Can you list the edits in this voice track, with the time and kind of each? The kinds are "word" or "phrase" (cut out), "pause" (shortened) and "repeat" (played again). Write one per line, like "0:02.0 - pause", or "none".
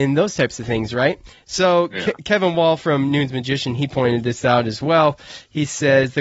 none